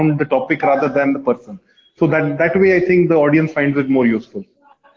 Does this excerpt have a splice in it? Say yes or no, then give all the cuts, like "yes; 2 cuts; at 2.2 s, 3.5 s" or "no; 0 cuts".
no; 0 cuts